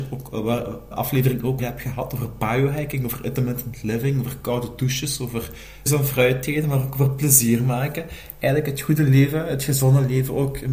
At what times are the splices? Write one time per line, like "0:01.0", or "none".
0:00.9
0:01.6
0:05.9